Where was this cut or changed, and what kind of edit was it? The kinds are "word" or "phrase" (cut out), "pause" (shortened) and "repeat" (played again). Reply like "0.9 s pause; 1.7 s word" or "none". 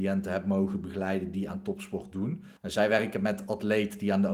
2.6 s pause